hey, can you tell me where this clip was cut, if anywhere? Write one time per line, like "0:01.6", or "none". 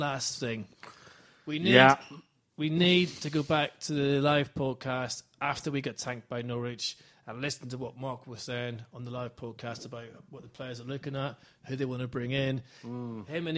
none